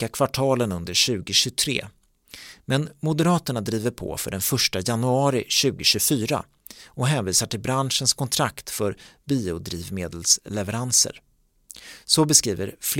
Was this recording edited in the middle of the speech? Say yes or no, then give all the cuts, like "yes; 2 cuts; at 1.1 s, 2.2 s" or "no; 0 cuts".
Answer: no; 0 cuts